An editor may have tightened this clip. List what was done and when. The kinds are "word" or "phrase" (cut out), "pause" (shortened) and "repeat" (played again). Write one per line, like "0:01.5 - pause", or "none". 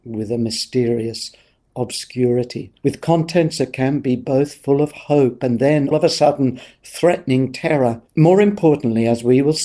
0:02.8 - pause
0:05.9 - word
0:08.1 - pause